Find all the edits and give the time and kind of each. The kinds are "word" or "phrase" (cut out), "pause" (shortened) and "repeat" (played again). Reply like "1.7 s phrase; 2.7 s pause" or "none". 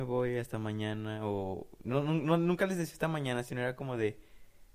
none

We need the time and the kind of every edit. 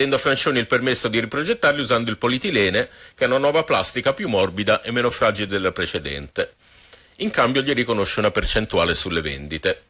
none

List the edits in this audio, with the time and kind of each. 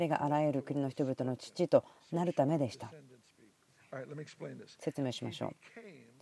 none

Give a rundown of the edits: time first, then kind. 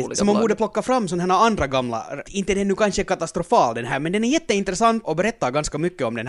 2.3 s word; 5.0 s word

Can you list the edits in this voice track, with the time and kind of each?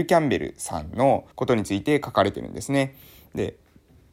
1.3 s pause

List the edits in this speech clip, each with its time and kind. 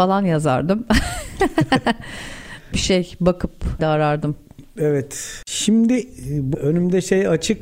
2.7 s word; 3.8 s word; 6.5 s word

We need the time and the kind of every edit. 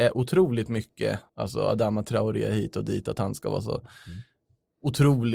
1.3 s pause

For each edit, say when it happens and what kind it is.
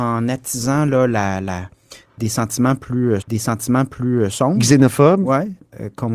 3.2 s repeat

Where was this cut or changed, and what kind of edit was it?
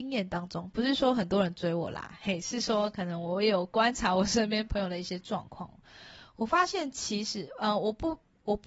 none

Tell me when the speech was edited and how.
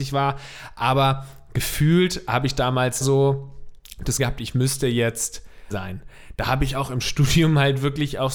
3.0 s word; 4.2 s word; 5.7 s word

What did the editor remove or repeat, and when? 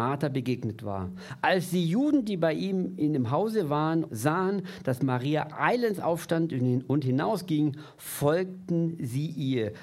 4.1 s phrase

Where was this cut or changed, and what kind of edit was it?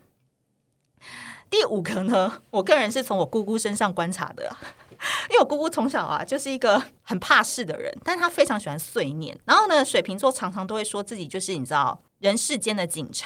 7.0 s pause; 9.4 s pause; 12.1 s pause

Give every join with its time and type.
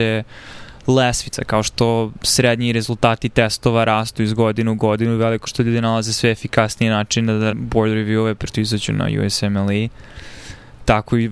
5.5 s word; 7.5 s word; 8.5 s word

